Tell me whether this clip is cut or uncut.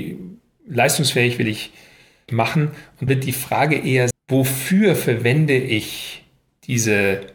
cut